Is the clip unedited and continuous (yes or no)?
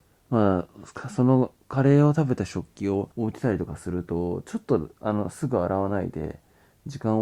no